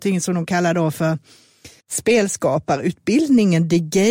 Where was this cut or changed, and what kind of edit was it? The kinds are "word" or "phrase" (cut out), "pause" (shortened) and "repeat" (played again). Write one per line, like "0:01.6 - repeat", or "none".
0:01.8 - pause